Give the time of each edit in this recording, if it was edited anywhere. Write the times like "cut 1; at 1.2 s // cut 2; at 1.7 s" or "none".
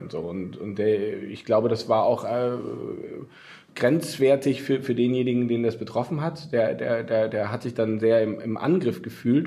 none